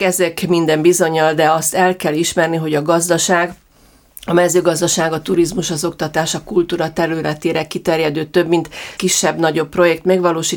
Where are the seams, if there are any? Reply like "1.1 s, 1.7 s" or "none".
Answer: 9.0 s